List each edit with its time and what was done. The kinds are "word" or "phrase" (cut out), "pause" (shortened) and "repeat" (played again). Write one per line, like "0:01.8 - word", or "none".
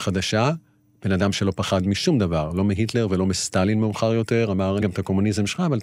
0:04.8 - word